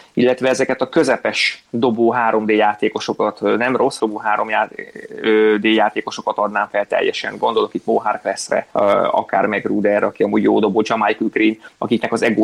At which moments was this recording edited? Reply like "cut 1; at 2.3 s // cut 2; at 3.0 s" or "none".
cut 1; at 4.0 s